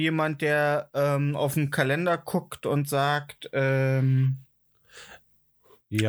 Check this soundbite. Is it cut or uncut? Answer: uncut